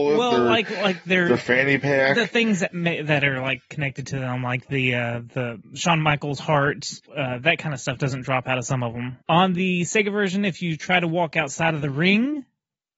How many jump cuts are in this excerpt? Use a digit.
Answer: 2